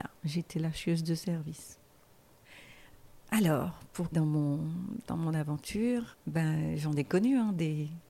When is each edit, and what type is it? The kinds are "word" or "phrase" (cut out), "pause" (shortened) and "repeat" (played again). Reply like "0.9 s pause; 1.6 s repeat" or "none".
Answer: 4.1 s word; 6.1 s word